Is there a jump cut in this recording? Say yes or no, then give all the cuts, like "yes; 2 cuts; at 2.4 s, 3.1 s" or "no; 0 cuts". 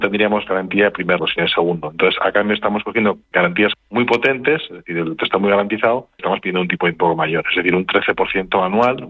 yes; 6 cuts; at 1.2 s, 3.3 s, 3.7 s, 5.2 s, 6.2 s, 6.9 s